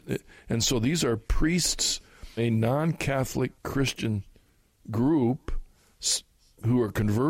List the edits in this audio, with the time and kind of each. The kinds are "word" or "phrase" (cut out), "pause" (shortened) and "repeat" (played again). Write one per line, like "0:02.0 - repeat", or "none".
0:02.4 - word